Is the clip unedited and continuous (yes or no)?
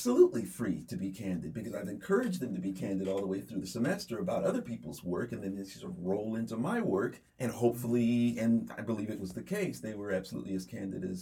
no